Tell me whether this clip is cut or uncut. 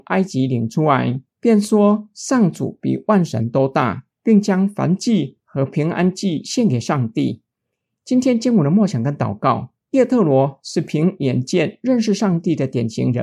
cut